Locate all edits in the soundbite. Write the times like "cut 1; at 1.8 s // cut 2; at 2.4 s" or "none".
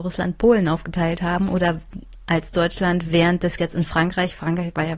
cut 1; at 3.6 s